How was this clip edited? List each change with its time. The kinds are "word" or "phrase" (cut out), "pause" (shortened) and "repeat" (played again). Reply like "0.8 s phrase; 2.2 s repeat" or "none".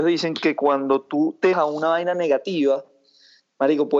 1.5 s word